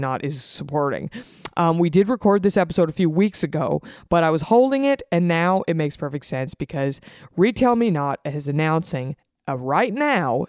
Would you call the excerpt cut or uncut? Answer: uncut